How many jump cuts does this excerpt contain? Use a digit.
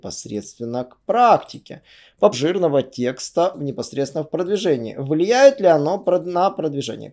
1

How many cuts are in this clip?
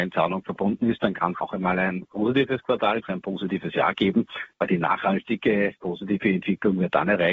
2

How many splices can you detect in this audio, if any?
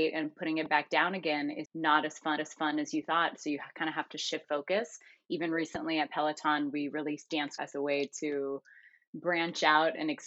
4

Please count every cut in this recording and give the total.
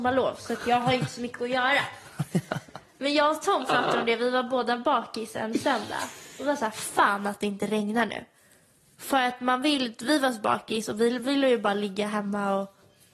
0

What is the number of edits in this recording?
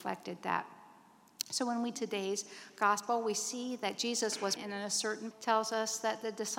3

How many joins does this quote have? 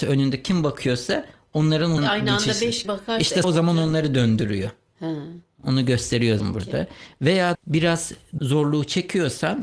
6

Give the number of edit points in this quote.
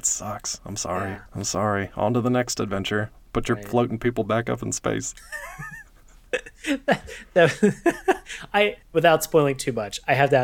3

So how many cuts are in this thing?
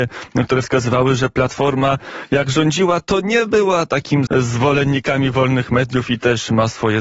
1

